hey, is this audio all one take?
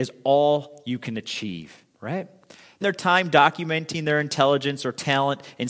no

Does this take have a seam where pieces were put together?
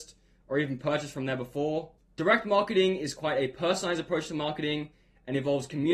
no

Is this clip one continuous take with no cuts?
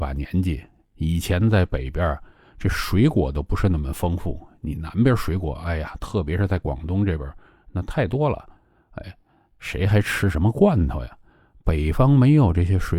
yes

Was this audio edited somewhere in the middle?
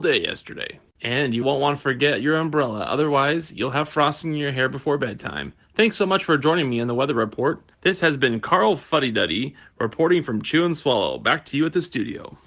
yes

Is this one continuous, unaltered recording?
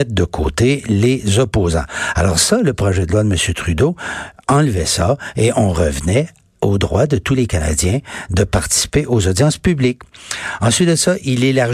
yes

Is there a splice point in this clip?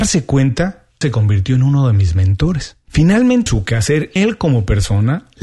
yes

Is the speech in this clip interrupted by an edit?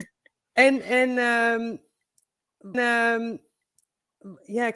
yes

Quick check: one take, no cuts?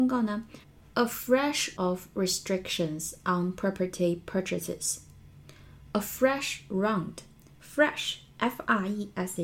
no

